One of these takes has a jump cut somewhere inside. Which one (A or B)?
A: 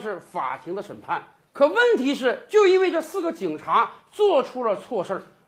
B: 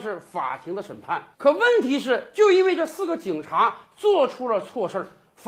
B